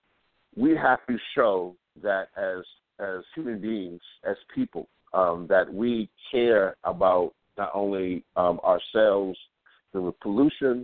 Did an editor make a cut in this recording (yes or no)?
yes